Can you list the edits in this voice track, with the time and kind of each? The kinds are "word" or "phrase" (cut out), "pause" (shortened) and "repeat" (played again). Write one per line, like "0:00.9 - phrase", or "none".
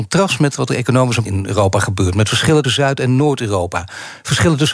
0:01.2 - phrase
0:02.6 - word